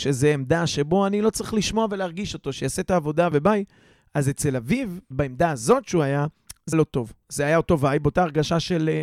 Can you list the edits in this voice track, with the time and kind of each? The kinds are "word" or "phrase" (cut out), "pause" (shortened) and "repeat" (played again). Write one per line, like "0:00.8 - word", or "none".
0:03.3 - word
0:05.1 - word
0:06.7 - word